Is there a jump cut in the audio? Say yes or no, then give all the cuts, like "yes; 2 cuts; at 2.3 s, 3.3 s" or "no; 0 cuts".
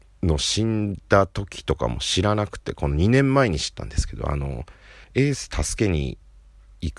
yes; 1 cut; at 5.0 s